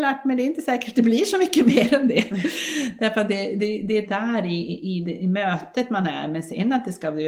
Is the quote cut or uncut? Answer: uncut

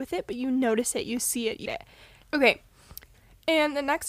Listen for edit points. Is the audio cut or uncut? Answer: cut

